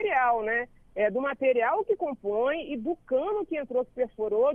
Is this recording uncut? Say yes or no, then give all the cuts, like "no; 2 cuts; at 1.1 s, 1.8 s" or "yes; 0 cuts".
yes; 0 cuts